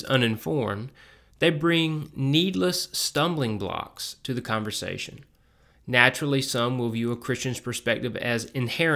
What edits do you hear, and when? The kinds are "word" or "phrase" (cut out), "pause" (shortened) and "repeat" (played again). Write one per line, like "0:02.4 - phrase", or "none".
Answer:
none